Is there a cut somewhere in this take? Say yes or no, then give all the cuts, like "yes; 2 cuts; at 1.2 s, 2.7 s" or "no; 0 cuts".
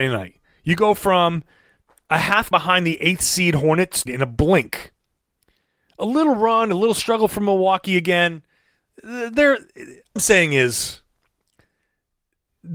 yes; 3 cuts; at 2.5 s, 4.1 s, 10.2 s